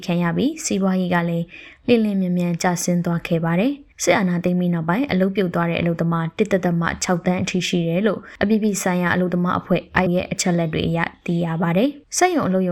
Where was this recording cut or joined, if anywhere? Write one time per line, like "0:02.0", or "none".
0:03.9
0:10.1